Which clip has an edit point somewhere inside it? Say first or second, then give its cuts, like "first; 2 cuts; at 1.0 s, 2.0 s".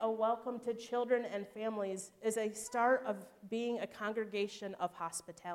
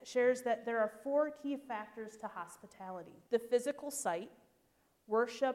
second; 1 cut; at 3.3 s